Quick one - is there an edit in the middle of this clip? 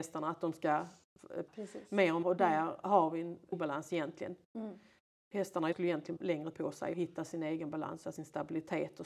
yes; 8 cuts; at 1.5 s, 2.2 s, 3.5 s, 5.7 s, 6.2 s, 6.5 s, 6.9 s, 8.0 s

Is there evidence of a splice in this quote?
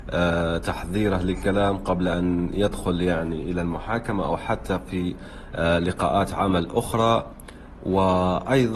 no; 0 cuts

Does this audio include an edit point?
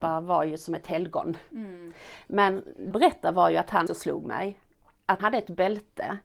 yes; 3 cuts; at 2.9 s, 3.9 s, 5.2 s

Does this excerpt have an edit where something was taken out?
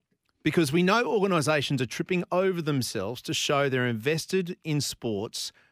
no; 0 cuts

